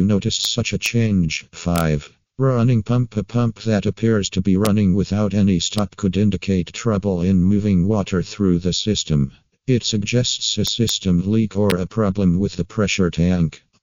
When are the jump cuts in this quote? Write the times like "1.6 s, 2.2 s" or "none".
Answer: none